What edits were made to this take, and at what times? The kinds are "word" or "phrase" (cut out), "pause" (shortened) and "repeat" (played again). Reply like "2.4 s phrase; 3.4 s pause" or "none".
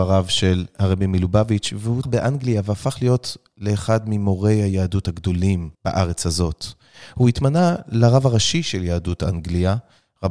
2.0 s word; 5.7 s pause